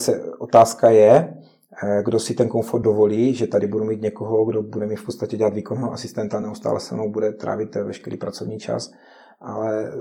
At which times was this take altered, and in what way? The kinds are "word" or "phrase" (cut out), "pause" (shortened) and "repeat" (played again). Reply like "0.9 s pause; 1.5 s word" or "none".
none